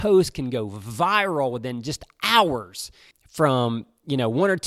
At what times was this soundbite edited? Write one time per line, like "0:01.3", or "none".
0:03.1